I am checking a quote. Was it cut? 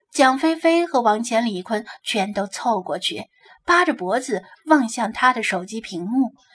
no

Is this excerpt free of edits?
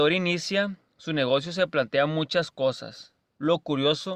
yes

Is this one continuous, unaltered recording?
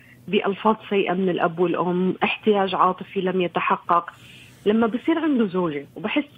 yes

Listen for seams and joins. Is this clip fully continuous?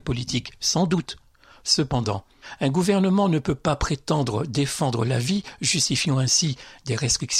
yes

